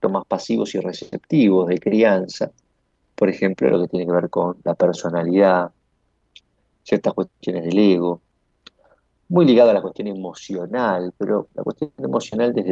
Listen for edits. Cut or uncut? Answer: uncut